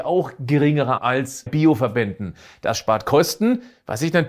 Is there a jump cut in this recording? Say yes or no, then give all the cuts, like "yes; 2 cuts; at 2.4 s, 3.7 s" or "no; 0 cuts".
yes; 2 cuts; at 1.0 s, 1.5 s